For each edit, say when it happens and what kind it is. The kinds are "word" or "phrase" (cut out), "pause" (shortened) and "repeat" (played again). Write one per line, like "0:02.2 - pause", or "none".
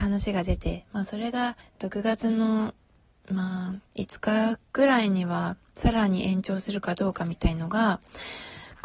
0:01.6 - pause
0:03.0 - pause
0:03.9 - pause